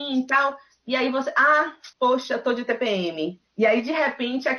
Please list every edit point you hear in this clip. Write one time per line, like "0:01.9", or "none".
0:01.9
0:03.5